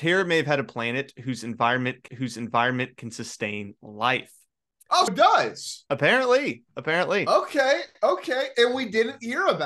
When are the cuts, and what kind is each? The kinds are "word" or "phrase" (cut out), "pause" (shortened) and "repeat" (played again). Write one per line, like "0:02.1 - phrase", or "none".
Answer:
0:02.1 - repeat
0:05.1 - word